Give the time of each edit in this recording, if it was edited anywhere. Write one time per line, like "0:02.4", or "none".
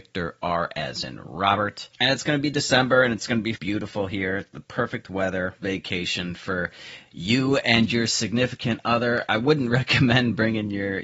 0:03.6
0:05.6